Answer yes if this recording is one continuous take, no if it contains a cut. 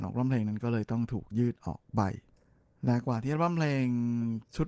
yes